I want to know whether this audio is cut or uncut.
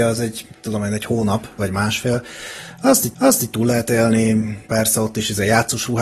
cut